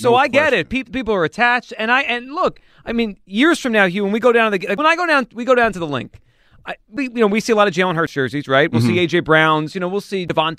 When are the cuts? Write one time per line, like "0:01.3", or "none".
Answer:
none